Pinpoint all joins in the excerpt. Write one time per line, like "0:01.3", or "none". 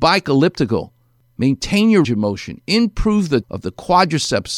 0:02.0
0:03.4